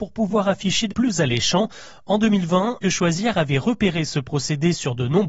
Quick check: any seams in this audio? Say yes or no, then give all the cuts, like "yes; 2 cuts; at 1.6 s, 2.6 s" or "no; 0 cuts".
yes; 2 cuts; at 0.9 s, 2.8 s